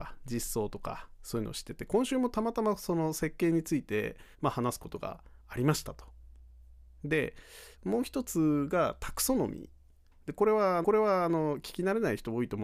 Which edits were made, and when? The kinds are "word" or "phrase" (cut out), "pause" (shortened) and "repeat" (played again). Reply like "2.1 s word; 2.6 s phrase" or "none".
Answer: 4.3 s pause; 7.7 s pause; 10.8 s repeat